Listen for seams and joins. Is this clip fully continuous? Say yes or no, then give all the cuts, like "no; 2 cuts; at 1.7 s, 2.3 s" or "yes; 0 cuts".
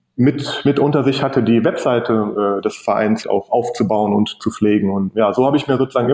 no; 2 cuts; at 3.2 s, 5.1 s